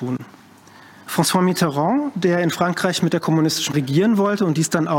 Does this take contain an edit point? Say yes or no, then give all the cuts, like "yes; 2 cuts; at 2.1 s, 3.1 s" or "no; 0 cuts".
yes; 1 cut; at 3.7 s